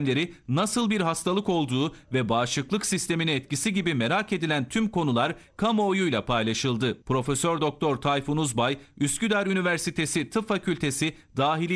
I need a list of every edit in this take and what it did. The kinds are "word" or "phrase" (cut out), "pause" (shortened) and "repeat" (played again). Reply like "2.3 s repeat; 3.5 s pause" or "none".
7.0 s pause